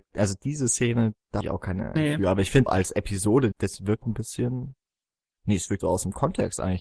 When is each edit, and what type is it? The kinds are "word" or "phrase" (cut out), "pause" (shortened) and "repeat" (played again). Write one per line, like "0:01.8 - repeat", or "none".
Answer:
0:01.4 - word
0:02.0 - word
0:02.7 - word
0:03.5 - word
0:04.0 - word
0:05.8 - word